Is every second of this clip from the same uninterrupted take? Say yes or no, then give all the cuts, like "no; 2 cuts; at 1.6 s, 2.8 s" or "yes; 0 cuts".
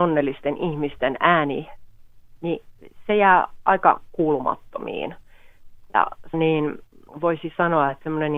no; 2 cuts; at 6.3 s, 7.1 s